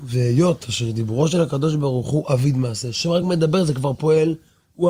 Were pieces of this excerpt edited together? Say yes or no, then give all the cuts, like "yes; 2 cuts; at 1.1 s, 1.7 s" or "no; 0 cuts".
no; 0 cuts